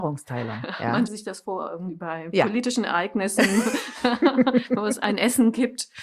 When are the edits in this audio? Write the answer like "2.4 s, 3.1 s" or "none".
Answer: 1.1 s